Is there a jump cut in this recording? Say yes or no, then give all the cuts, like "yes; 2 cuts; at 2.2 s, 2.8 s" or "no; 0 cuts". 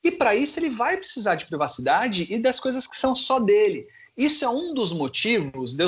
no; 0 cuts